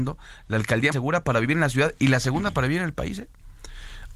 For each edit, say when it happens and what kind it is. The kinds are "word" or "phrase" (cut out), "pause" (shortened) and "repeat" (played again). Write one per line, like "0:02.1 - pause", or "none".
0:00.9 - word